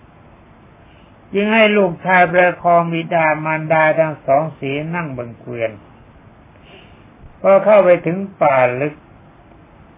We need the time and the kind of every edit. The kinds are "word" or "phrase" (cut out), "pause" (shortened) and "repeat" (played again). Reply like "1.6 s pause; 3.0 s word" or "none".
7.3 s pause